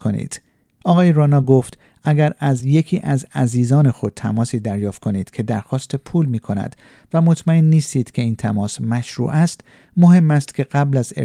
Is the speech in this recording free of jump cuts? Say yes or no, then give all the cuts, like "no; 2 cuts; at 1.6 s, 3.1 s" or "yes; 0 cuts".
yes; 0 cuts